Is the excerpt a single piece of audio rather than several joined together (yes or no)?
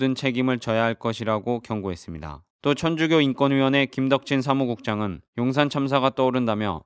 no